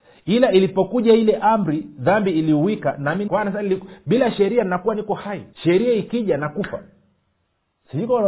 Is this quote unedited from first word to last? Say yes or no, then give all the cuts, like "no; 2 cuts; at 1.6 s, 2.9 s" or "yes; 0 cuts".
no; 2 cuts; at 3.3 s, 5.5 s